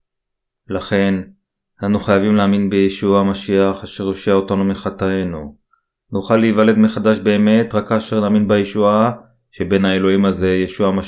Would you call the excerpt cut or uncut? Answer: uncut